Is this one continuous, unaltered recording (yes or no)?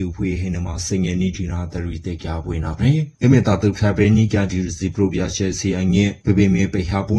no